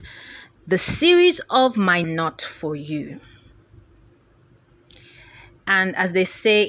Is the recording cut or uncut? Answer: cut